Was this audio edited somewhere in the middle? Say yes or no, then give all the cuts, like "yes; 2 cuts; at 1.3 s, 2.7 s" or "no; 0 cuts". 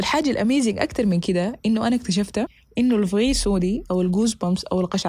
no; 0 cuts